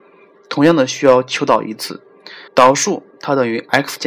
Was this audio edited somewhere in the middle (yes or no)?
yes